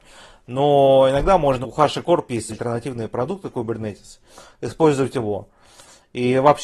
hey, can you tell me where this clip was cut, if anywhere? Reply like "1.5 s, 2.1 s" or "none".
1.6 s, 2.5 s